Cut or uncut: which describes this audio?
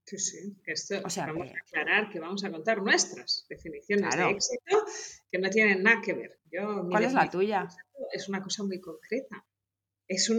uncut